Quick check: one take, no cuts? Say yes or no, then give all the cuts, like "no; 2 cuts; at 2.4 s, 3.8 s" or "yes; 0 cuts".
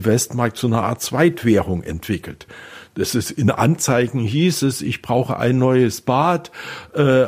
yes; 0 cuts